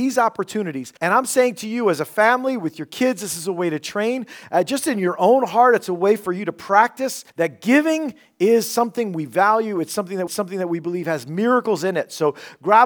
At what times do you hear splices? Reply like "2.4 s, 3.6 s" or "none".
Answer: 1.0 s, 7.3 s, 10.3 s

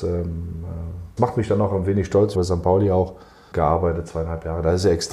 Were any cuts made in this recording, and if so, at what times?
1.2 s, 2.3 s, 3.5 s

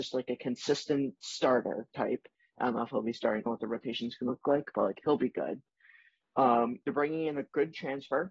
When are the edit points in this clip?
3.5 s, 4.3 s, 6.8 s

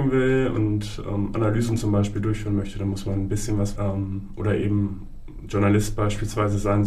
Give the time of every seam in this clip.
3.8 s

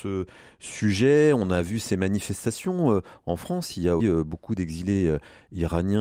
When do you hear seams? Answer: 4.0 s

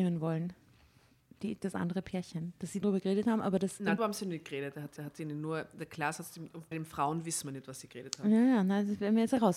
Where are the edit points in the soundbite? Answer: 2.8 s, 4.0 s, 5.0 s, 6.7 s

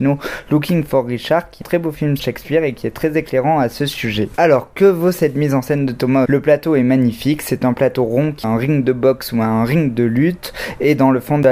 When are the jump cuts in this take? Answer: 1.6 s, 2.2 s, 6.3 s, 8.4 s

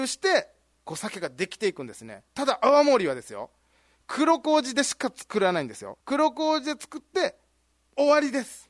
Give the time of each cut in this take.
6.0 s

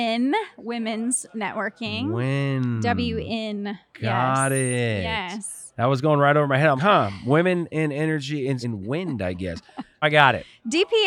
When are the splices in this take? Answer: 6.8 s, 8.6 s, 10.0 s

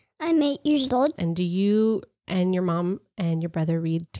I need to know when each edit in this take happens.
none

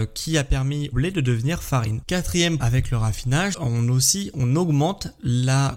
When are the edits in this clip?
0.9 s, 2.6 s, 3.5 s

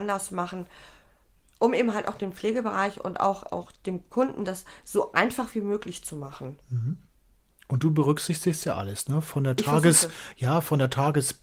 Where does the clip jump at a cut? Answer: none

